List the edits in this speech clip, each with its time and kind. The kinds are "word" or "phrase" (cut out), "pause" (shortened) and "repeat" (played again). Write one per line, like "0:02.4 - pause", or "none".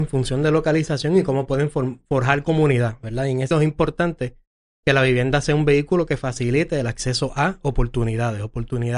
0:03.5 - word